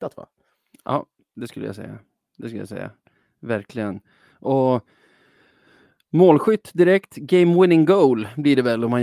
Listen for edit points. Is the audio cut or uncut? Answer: uncut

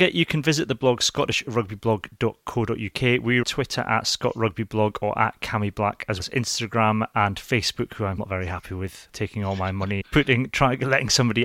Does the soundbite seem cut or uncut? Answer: cut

